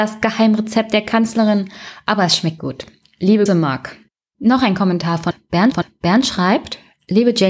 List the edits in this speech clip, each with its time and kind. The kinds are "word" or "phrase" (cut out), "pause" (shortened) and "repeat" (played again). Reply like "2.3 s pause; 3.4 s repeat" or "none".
2.6 s word; 3.5 s word; 5.7 s repeat

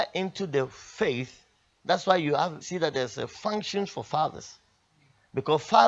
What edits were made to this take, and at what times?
2.6 s word

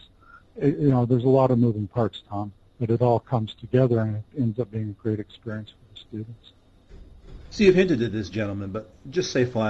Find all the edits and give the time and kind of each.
none

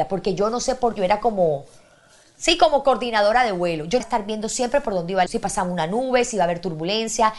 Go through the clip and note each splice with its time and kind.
1.0 s word; 4.0 s word; 5.3 s word

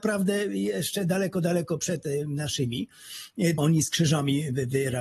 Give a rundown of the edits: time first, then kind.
3.6 s word

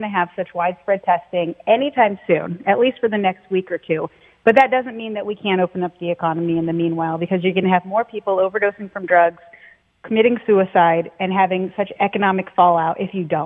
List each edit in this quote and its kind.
none

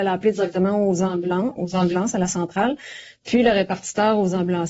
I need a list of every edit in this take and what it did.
1.6 s word

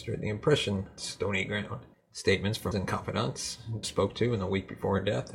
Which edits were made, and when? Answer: 1.0 s phrase; 1.9 s pause; 2.7 s phrase; 3.8 s word

